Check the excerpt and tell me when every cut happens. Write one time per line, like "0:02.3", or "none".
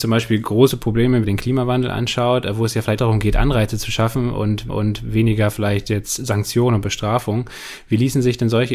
0:01.2
0:03.0
0:04.7